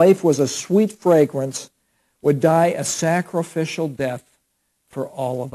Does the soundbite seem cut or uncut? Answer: uncut